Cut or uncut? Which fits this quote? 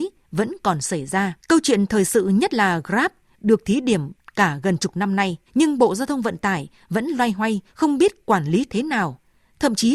cut